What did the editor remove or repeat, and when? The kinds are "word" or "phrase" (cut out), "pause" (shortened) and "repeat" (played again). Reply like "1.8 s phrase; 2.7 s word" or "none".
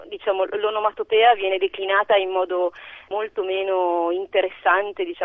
none